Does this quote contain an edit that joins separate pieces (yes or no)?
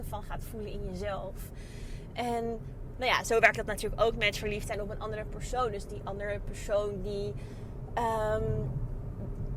no